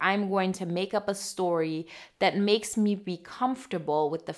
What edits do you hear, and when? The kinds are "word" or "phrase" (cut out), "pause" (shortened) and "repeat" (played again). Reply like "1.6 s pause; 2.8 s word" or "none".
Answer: none